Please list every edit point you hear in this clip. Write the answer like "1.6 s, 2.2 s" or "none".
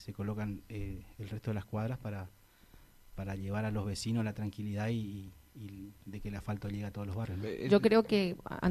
none